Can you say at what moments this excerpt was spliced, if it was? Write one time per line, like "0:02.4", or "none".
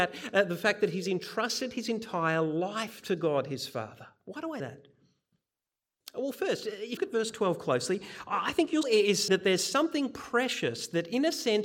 0:04.6
0:07.0
0:08.8
0:09.3